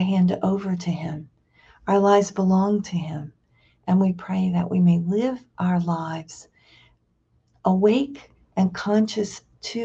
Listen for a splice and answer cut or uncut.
uncut